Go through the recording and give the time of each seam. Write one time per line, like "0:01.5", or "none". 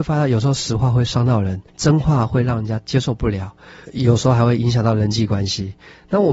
0:01.7
0:03.8